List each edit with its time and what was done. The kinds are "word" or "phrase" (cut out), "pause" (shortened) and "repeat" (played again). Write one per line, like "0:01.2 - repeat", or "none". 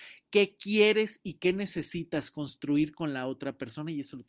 none

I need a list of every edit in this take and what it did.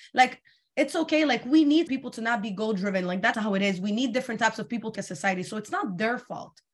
0:01.9 - word
0:03.3 - word
0:04.9 - word

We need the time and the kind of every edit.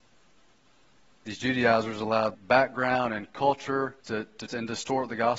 0:02.3 - word
0:04.0 - pause
0:04.5 - word

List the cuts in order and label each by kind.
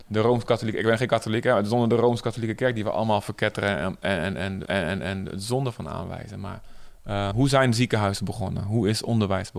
0:04.6 - repeat
0:07.3 - word

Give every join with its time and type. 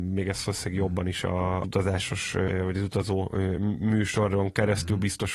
none

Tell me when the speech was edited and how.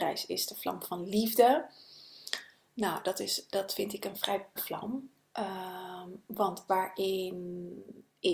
0:04.6 - word
0:06.7 - word

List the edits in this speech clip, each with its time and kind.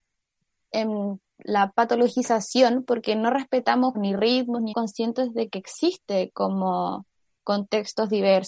0:03.9 - word
0:04.7 - phrase

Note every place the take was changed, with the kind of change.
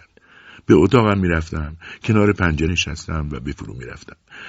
0:02.7 - word
0:03.5 - word

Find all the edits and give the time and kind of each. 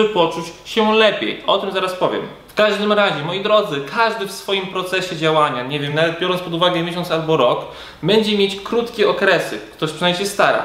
none

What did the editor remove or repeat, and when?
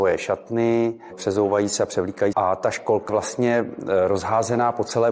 0:02.3 - phrase
0:03.1 - word

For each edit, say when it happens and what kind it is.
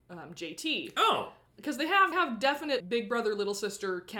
0:02.1 - phrase
0:02.8 - word

